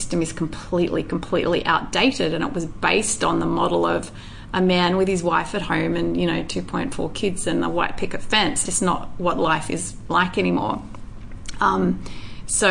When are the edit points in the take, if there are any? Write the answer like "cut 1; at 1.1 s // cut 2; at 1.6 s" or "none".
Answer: cut 1; at 8.6 s